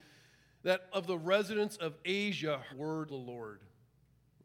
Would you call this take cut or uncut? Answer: cut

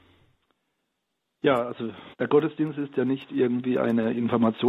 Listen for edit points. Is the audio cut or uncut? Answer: cut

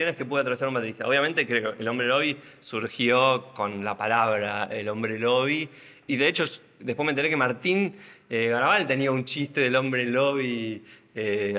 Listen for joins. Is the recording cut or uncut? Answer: uncut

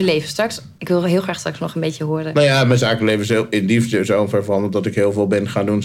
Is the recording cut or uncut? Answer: uncut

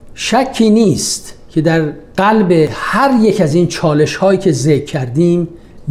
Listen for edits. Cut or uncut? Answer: uncut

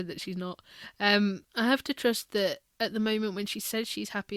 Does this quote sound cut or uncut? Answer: cut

